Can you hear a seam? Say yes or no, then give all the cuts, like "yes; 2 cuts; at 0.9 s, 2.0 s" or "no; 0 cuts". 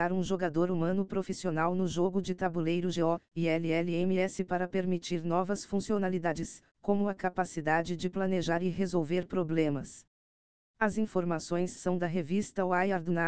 no; 0 cuts